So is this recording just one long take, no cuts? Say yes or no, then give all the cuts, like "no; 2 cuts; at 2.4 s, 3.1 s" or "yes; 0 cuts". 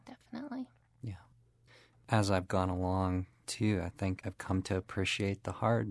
yes; 0 cuts